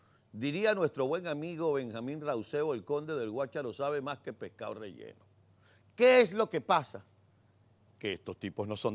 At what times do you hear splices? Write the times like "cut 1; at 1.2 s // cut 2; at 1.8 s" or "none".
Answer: none